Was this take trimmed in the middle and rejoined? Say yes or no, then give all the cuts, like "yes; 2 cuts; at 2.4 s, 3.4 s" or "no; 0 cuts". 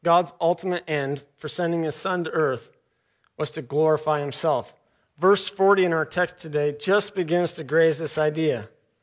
no; 0 cuts